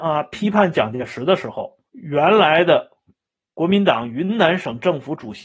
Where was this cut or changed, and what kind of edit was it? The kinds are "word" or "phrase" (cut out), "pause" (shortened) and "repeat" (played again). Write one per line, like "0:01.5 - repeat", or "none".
0:01.9 - pause